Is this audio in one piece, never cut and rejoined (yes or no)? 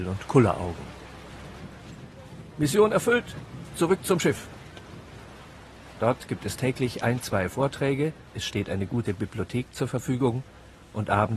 no